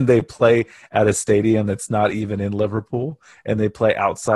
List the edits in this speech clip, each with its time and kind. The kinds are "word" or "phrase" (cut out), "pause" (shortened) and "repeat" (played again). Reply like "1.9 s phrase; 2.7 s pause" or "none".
none